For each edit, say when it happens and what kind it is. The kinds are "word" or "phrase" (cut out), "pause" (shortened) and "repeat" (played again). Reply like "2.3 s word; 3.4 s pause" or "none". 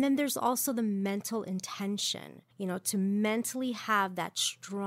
2.5 s pause